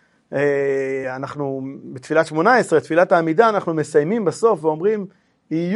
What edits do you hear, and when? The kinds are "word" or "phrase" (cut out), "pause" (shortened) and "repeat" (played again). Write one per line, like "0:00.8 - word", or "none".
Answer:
none